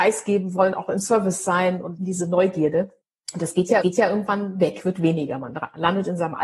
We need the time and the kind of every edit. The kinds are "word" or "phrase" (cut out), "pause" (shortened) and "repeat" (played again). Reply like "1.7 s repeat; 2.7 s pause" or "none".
2.0 s word; 3.0 s pause; 3.8 s repeat